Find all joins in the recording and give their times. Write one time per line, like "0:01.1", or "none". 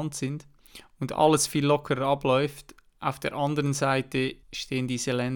0:04.4